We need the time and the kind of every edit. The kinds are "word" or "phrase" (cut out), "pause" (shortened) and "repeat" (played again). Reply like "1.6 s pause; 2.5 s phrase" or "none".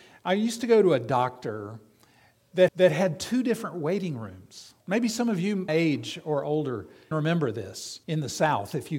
2.7 s repeat; 4.8 s pause; 5.7 s word; 7.1 s word; 8.0 s pause